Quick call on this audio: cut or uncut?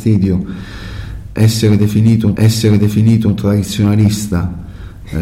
cut